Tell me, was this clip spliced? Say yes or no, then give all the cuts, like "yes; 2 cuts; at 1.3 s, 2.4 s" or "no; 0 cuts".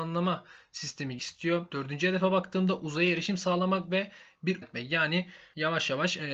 yes; 2 cuts; at 1.2 s, 4.6 s